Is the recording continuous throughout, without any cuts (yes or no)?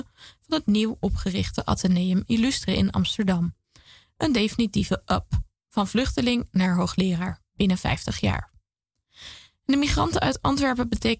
yes